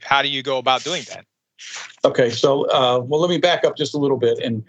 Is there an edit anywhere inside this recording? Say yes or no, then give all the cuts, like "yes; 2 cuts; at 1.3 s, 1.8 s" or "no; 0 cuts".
no; 0 cuts